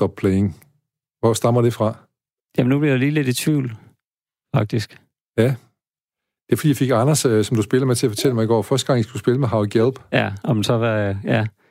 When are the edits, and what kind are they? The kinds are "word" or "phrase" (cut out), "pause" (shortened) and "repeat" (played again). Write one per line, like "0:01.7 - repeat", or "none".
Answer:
none

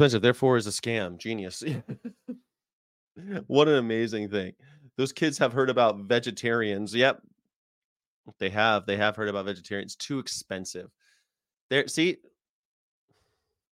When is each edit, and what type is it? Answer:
none

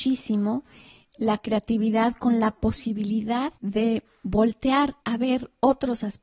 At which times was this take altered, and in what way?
0:03.6 - pause
0:05.0 - pause

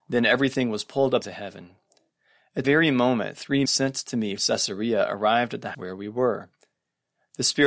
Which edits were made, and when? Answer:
0:01.2 - word
0:02.6 - word
0:03.7 - word
0:04.4 - word
0:05.7 - word

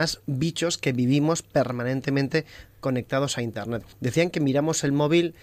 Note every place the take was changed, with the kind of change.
0:03.9 - pause

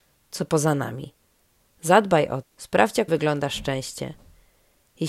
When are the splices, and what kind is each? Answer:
0:02.4 - word
0:03.1 - phrase

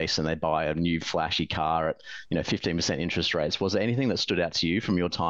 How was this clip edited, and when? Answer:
none

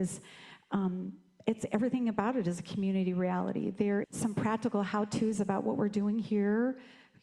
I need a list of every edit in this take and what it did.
0:04.0 - word

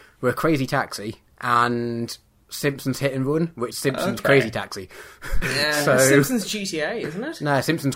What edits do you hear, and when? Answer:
0:01.3 - pause
0:03.7 - word
0:05.4 - word

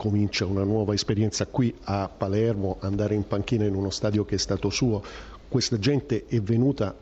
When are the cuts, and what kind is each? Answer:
none

